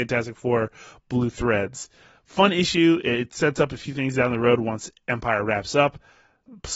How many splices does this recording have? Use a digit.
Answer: 0